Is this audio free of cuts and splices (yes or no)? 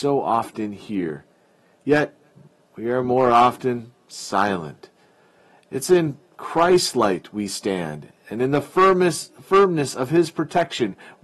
yes